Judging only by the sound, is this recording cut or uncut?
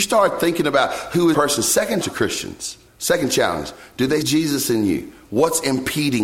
cut